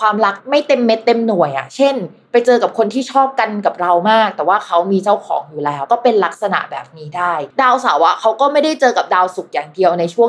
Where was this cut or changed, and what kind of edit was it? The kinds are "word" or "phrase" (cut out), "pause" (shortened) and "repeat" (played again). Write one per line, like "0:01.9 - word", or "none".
0:07.5 - pause